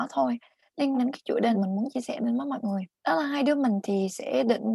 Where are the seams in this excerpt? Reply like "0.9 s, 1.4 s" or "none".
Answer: 0.9 s, 1.5 s, 2.9 s